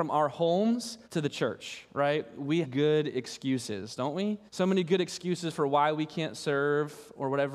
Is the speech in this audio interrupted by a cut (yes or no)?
yes